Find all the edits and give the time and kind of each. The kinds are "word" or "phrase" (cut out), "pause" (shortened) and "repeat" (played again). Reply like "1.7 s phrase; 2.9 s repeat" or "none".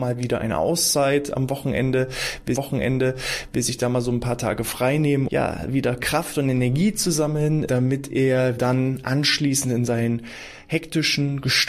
2.6 s repeat; 5.3 s word; 7.7 s word; 8.6 s word